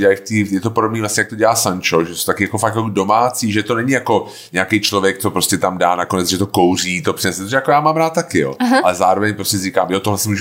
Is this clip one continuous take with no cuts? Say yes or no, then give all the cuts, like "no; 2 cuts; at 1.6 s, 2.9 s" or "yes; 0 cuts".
yes; 0 cuts